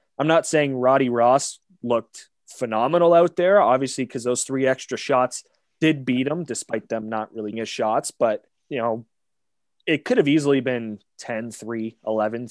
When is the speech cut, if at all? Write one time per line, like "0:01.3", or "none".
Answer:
0:07.5
0:08.5